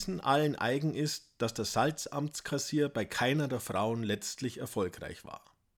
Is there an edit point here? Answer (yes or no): no